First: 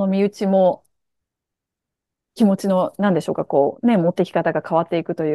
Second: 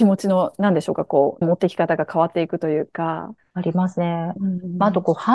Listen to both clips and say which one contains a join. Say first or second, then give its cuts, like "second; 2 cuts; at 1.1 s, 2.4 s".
second; 2 cuts; at 1.4 s, 3.4 s